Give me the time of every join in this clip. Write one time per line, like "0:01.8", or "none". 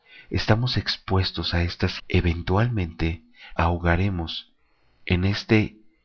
0:02.0
0:03.6